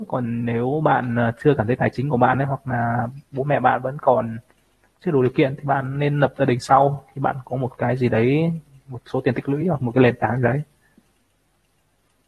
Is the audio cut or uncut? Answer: uncut